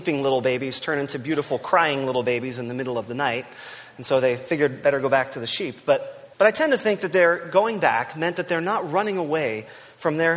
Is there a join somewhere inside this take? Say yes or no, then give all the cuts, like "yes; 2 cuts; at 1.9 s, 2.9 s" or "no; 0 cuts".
yes; 1 cut; at 6.3 s